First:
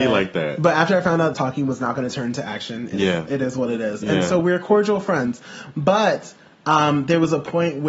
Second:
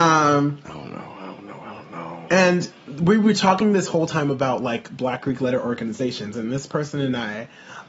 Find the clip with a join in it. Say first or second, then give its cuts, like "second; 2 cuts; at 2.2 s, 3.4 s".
first; 1 cut; at 1.3 s